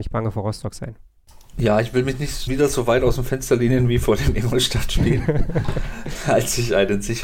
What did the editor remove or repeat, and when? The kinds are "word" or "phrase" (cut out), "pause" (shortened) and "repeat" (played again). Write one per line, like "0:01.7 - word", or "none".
0:02.5 - word